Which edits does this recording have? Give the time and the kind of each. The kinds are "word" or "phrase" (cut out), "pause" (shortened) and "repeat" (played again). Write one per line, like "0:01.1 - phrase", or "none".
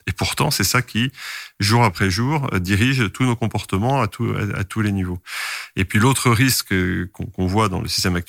none